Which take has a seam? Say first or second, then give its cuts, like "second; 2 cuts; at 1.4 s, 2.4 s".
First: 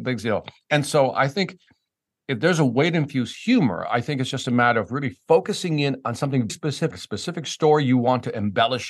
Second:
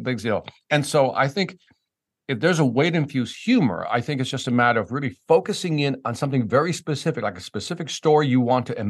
first; 2 cuts; at 6.5 s, 6.9 s